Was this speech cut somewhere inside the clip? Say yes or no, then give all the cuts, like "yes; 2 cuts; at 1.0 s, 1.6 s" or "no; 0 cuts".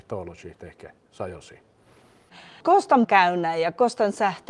yes; 1 cut; at 3.0 s